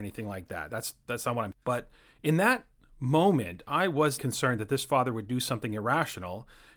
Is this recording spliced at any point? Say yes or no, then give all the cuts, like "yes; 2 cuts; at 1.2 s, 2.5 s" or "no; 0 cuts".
yes; 2 cuts; at 1.5 s, 4.2 s